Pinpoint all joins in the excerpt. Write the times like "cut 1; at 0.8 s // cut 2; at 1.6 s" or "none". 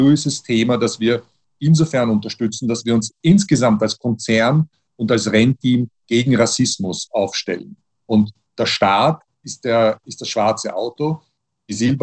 none